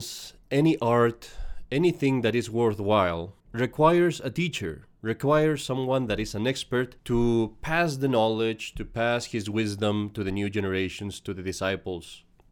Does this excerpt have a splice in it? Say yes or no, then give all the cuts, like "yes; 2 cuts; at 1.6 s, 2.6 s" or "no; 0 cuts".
yes; 2 cuts; at 3.4 s, 7.0 s